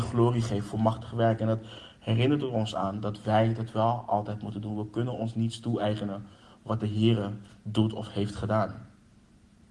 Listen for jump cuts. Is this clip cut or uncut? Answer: uncut